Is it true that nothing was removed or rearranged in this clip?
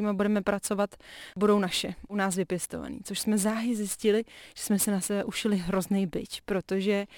yes; 0 cuts

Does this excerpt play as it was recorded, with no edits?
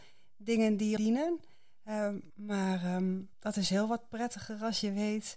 no; 3 cuts; at 1.0 s, 2.3 s, 3.3 s

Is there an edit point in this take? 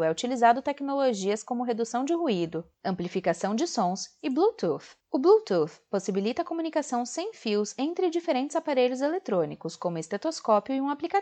yes; 1 cut; at 5.0 s

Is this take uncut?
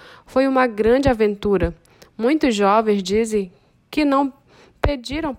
yes; 0 cuts

